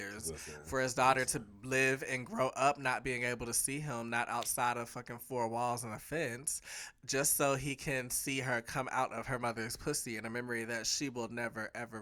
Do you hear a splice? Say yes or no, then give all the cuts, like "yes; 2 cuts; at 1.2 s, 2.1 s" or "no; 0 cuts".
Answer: no; 0 cuts